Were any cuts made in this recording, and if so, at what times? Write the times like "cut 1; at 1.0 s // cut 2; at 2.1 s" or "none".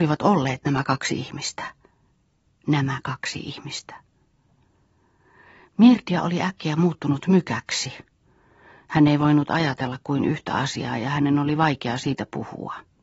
none